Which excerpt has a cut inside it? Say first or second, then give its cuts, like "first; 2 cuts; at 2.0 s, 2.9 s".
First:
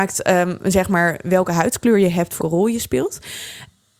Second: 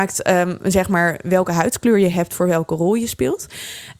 first; 1 cut; at 2.4 s